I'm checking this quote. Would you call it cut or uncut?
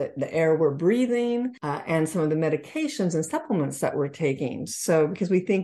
cut